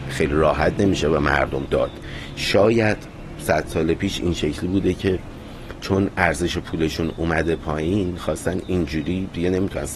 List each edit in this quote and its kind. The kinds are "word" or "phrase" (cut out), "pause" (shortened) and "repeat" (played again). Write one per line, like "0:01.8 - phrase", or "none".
0:01.7 - word